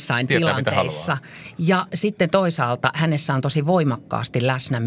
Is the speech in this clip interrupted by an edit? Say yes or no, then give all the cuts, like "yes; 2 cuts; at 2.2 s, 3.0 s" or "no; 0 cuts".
no; 0 cuts